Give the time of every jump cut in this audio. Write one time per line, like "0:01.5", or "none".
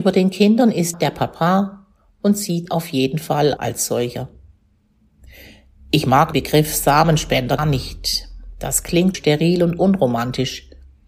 0:00.9
0:02.7
0:03.6
0:06.3
0:07.6
0:09.1